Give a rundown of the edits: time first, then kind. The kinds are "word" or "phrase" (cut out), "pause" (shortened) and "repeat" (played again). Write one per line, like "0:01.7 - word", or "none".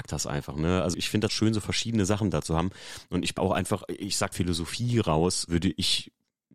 0:00.9 - word
0:01.3 - word
0:03.4 - word
0:04.3 - phrase
0:05.5 - word